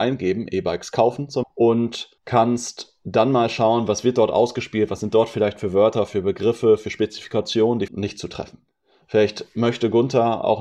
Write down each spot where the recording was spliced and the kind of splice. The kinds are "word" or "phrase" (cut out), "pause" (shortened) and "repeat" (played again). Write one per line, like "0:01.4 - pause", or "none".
0:01.4 - word
0:02.2 - pause
0:07.9 - phrase